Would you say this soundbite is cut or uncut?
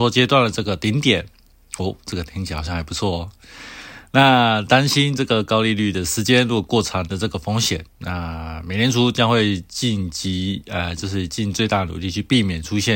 cut